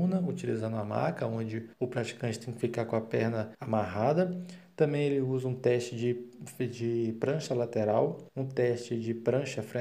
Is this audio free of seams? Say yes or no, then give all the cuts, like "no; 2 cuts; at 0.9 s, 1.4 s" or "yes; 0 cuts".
no; 3 cuts; at 1.7 s, 3.5 s, 8.3 s